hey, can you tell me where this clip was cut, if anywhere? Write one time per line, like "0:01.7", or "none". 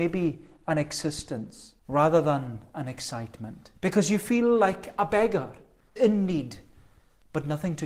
0:01.8
0:03.8
0:06.0